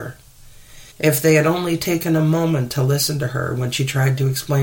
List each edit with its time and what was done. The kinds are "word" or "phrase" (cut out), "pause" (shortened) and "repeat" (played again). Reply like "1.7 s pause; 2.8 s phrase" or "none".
0.9 s pause